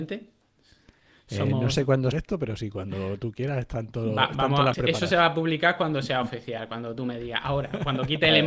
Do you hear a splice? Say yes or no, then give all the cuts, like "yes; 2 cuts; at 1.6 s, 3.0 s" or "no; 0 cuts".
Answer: yes; 2 cuts; at 2.1 s, 4.7 s